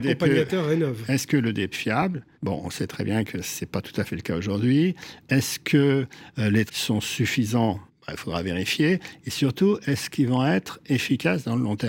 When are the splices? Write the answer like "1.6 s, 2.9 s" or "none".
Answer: 1.7 s, 2.3 s, 6.7 s, 7.9 s